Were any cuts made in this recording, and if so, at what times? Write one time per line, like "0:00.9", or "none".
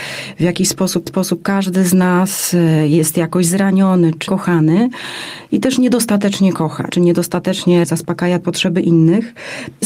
0:01.1
0:04.3